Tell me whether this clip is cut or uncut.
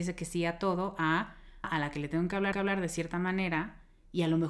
cut